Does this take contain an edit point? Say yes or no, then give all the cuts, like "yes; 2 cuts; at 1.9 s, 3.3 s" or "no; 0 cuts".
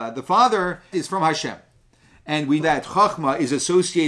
yes; 2 cuts; at 0.9 s, 2.6 s